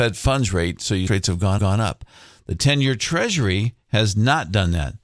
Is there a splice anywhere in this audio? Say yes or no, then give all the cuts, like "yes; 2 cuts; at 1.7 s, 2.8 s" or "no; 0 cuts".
yes; 2 cuts; at 1.1 s, 1.6 s